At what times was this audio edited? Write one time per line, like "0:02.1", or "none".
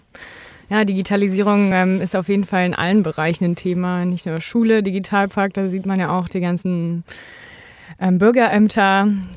none